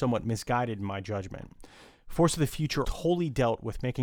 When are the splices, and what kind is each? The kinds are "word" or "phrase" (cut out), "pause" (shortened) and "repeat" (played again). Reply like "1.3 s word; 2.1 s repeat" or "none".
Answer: 2.8 s word